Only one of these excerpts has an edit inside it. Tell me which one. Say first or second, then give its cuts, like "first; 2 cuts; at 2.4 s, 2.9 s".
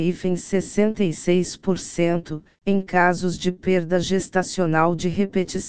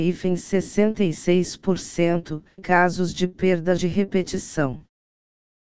second; 2 cuts; at 2.6 s, 3.8 s